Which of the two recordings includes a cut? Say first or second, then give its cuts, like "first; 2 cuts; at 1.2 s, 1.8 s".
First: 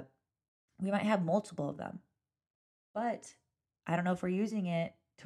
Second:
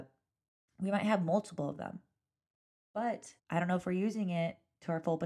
second; 1 cut; at 3.4 s